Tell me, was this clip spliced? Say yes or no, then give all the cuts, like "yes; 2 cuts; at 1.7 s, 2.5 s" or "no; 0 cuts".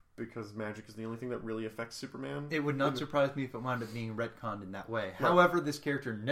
no; 0 cuts